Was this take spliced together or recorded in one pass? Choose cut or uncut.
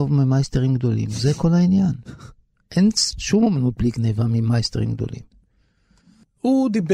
uncut